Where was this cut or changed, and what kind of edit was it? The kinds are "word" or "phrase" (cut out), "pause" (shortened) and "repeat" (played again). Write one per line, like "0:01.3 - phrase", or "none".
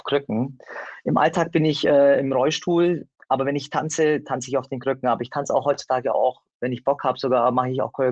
none